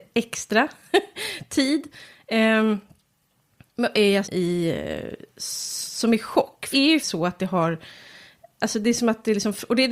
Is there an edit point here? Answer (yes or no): yes